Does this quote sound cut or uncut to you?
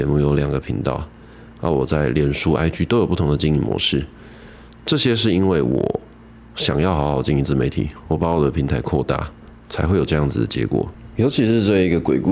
uncut